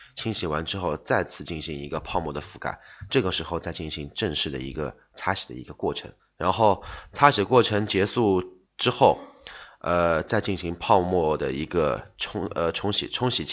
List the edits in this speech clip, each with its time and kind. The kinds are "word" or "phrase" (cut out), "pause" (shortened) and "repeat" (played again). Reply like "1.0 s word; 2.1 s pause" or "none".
6.2 s pause; 8.7 s pause